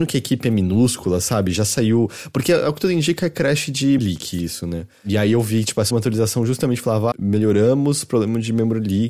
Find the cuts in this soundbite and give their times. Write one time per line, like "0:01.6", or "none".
0:04.0
0:05.9
0:07.1